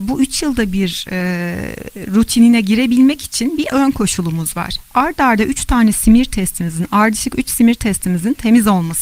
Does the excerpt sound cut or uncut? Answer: uncut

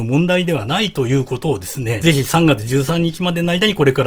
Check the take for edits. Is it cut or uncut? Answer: cut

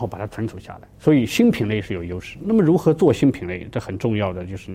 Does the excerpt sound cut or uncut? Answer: cut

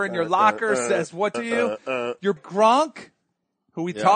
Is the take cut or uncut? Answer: cut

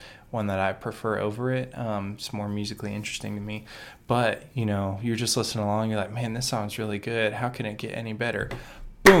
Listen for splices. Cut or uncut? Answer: uncut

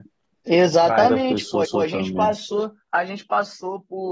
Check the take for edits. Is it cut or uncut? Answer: cut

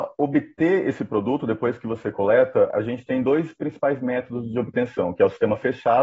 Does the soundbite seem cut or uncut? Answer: uncut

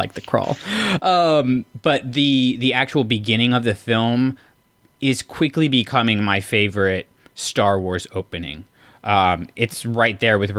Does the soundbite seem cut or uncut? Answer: uncut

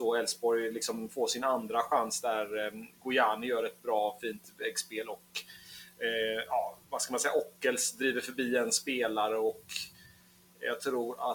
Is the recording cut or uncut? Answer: cut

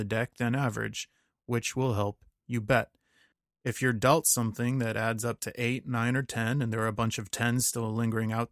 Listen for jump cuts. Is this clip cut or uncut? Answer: uncut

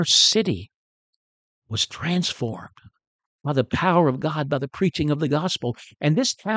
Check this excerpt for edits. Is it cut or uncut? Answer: uncut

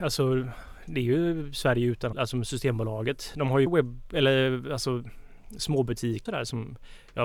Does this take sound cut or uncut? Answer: cut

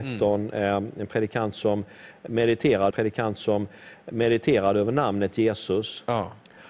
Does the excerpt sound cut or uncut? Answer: cut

